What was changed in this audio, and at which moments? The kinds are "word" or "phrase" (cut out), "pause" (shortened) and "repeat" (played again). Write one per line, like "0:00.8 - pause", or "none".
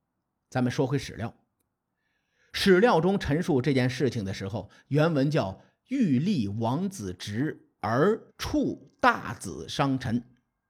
0:08.3 - pause